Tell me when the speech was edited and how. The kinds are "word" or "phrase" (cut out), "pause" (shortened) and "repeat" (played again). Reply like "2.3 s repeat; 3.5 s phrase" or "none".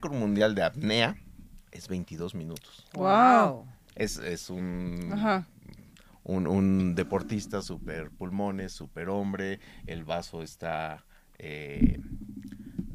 none